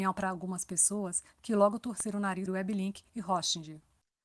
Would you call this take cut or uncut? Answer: cut